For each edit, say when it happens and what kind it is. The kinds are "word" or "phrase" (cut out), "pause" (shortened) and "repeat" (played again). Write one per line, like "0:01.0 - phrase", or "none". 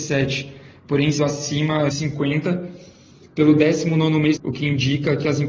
0:01.2 - word
0:01.9 - word
0:04.4 - word